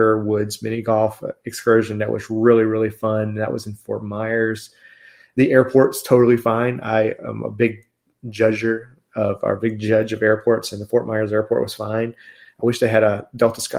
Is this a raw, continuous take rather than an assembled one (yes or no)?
yes